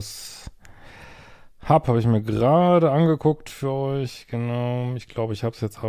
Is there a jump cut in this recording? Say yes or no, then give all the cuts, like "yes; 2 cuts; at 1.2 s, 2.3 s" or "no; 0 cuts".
no; 0 cuts